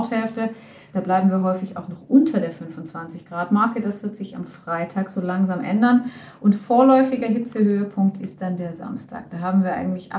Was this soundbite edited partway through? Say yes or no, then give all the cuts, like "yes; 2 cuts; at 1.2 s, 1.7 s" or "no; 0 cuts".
no; 0 cuts